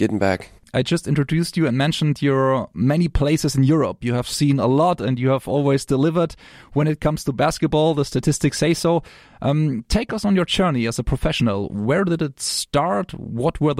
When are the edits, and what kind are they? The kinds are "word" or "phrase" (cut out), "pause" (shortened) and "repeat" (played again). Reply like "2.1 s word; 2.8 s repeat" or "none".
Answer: none